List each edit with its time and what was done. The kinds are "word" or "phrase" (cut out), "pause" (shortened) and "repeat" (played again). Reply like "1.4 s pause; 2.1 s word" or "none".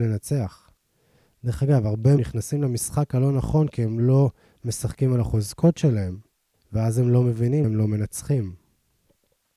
2.2 s phrase; 6.5 s pause; 7.6 s word